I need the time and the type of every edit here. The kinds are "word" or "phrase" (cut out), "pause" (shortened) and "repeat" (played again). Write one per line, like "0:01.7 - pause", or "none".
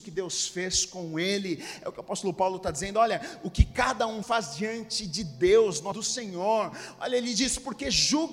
0:04.2 - word
0:05.9 - word